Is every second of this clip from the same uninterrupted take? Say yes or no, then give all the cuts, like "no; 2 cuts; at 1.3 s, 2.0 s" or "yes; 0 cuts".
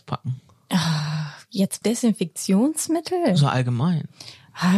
no; 1 cut; at 1.8 s